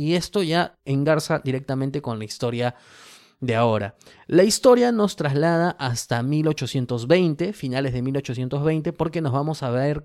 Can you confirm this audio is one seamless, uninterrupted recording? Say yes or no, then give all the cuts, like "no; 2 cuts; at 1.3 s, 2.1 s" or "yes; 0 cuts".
yes; 0 cuts